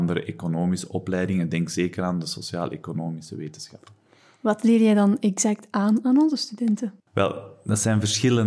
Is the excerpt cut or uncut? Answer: cut